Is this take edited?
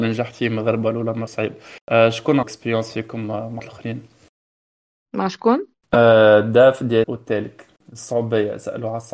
yes; 6 cuts; at 1.3 s, 1.8 s, 2.4 s, 3.6 s, 5.8 s, 7.0 s

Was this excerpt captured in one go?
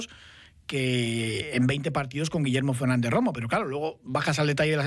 yes; 0 cuts

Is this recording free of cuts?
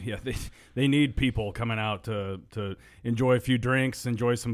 yes; 0 cuts

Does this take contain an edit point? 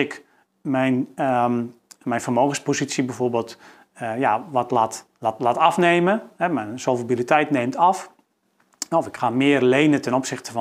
no; 0 cuts

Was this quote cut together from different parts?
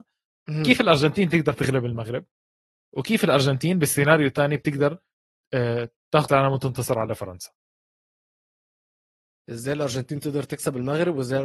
yes; 1 cut; at 6.3 s

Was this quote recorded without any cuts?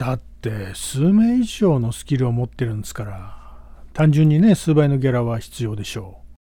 yes; 0 cuts

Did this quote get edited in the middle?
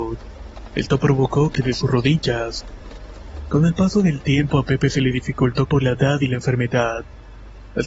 yes; 2 cuts; at 1.5 s, 5.6 s

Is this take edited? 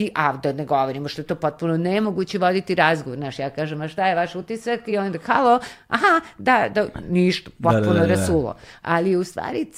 no; 0 cuts

